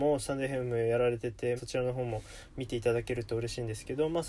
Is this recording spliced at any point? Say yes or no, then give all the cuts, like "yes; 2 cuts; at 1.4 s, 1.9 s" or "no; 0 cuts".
yes; 1 cut; at 1.6 s